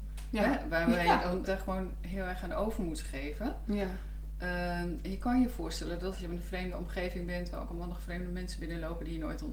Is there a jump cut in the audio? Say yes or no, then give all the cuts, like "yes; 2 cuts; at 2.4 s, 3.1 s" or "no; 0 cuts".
yes; 2 cuts; at 1.4 s, 6.1 s